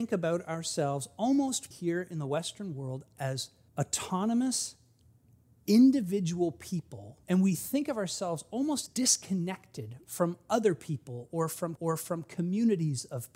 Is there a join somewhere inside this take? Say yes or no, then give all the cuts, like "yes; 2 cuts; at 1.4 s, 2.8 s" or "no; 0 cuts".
yes; 5 cuts; at 1.7 s, 3.7 s, 7.2 s, 8.9 s, 11.8 s